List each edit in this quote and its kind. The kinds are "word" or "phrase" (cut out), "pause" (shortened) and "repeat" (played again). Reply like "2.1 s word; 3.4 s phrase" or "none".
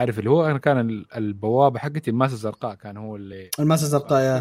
none